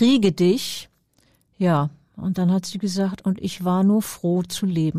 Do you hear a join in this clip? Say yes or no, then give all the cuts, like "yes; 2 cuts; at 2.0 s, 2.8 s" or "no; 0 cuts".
no; 0 cuts